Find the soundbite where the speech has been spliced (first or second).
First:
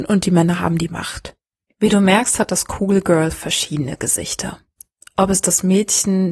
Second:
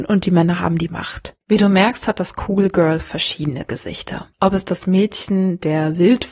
second